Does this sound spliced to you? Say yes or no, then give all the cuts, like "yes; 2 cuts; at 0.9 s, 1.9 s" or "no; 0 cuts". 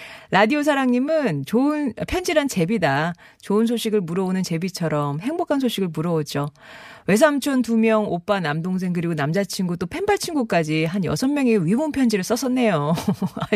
no; 0 cuts